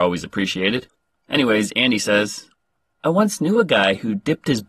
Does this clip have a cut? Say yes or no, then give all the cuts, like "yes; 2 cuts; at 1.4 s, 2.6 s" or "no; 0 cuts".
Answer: no; 0 cuts